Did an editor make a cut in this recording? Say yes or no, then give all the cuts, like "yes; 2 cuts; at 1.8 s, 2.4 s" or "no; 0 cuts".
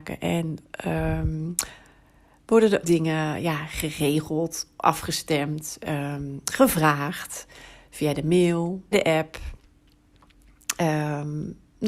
yes; 2 cuts; at 2.8 s, 8.9 s